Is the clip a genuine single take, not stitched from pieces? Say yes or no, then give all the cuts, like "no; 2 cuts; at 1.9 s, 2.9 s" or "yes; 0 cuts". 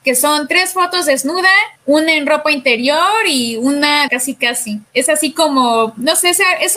no; 3 cuts; at 1.8 s, 4.1 s, 4.9 s